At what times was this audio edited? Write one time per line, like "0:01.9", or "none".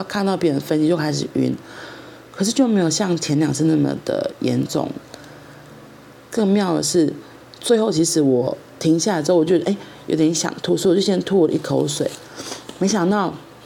none